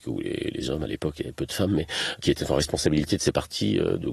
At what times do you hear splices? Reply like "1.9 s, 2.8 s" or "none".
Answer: none